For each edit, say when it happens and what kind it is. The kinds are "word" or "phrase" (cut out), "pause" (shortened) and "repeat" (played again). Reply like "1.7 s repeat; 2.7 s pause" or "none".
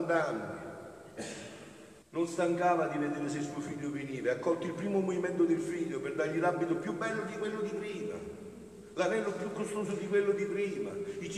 2.0 s pause